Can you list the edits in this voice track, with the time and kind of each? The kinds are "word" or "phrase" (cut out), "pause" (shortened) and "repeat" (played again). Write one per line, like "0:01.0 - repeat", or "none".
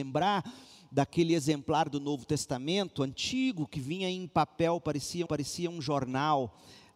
0:05.3 - repeat